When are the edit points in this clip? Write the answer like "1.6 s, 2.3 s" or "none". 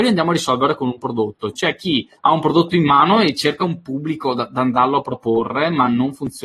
2.2 s